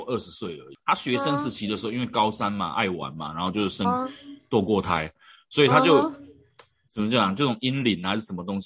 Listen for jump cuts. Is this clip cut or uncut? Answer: uncut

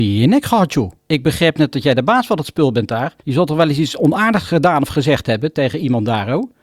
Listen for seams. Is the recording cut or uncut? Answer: cut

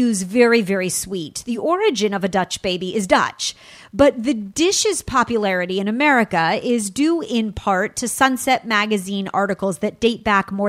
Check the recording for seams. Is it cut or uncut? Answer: uncut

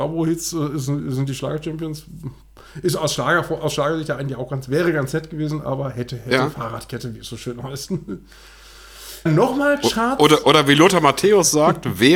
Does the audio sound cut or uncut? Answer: cut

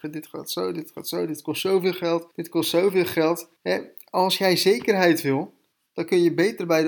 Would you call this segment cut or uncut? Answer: cut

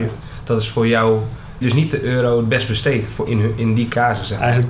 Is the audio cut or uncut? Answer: cut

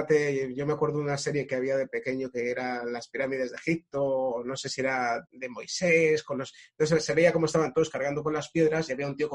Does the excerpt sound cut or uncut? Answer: cut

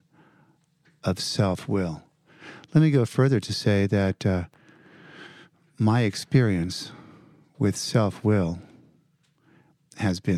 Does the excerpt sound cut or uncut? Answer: uncut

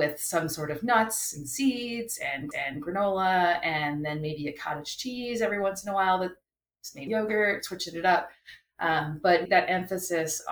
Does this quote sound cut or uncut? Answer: cut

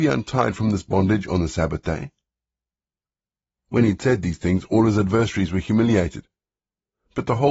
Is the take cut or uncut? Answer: uncut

